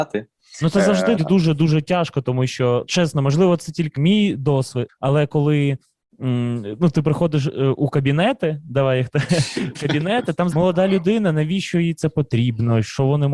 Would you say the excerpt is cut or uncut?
cut